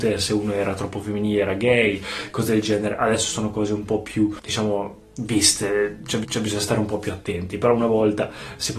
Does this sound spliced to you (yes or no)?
yes